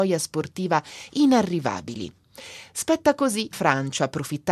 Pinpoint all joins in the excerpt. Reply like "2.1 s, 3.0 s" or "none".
3.5 s